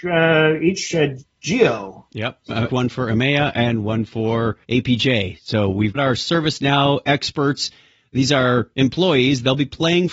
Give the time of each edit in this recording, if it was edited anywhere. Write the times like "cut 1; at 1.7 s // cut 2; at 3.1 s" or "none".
cut 1; at 2.7 s // cut 2; at 4.6 s // cut 3; at 5.9 s